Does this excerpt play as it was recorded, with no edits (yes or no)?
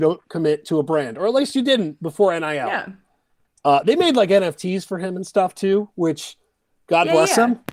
yes